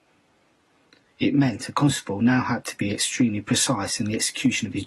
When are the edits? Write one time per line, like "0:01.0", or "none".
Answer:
none